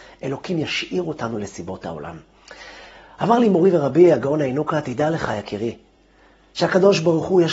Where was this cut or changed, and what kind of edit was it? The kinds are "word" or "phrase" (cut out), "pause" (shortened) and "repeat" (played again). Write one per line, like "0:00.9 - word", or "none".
none